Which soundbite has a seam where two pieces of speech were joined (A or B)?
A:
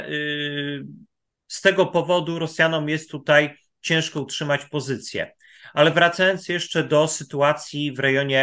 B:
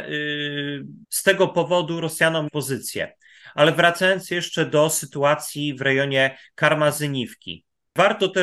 B